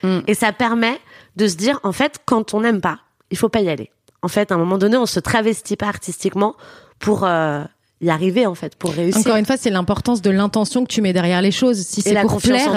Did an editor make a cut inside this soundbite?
no; 0 cuts

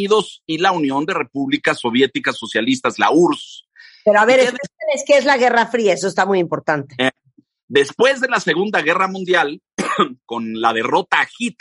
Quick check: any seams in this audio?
no; 0 cuts

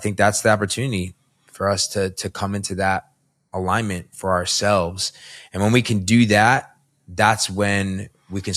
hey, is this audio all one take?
yes; 0 cuts

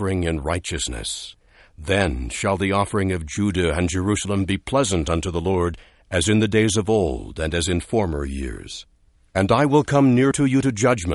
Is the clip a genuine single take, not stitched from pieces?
yes; 0 cuts

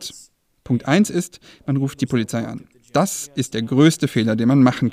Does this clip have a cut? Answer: yes; 2 cuts; at 2.0 s, 3.5 s

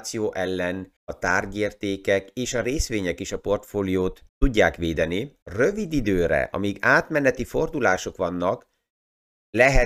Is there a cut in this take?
yes; 3 cuts; at 1.0 s, 4.3 s, 5.4 s

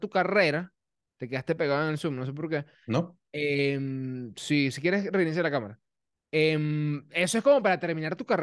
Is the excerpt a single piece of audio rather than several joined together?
yes; 0 cuts

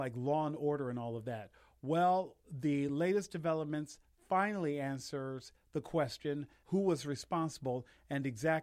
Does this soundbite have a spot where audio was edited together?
no; 0 cuts

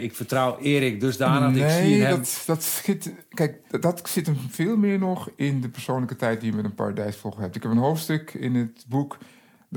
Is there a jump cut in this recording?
yes; 1 cut; at 3.7 s

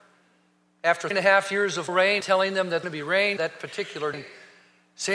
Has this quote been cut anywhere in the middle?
yes; 6 cuts; at 1.1 s, 1.9 s, 2.2 s, 2.8 s, 3.4 s, 4.1 s

